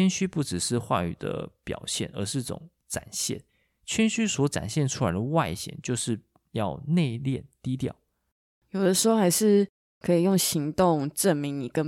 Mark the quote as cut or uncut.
uncut